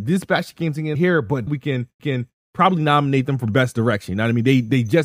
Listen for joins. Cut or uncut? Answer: cut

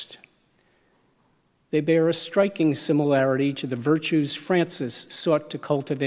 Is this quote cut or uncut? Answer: uncut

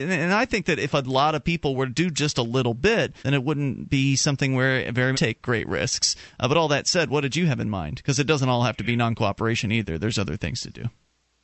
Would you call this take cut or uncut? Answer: cut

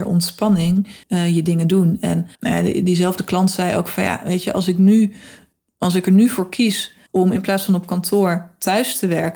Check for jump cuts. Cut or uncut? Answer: cut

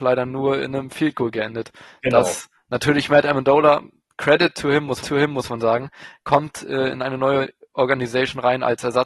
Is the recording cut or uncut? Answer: cut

